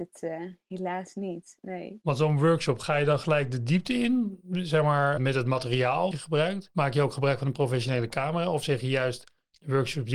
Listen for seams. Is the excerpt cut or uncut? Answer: cut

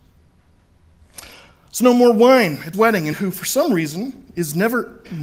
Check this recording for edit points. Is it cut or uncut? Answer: cut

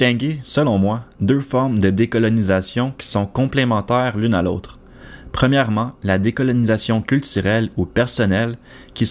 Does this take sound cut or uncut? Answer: uncut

